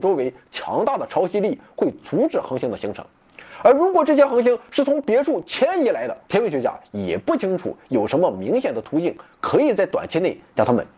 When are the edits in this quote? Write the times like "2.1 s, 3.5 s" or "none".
6.2 s

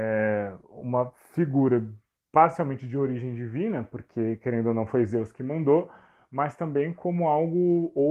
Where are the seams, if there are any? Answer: none

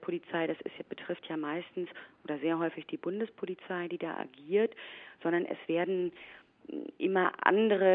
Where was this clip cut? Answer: none

